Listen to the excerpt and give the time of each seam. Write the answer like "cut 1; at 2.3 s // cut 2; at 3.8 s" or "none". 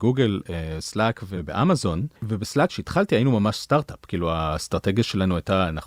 cut 1; at 2.2 s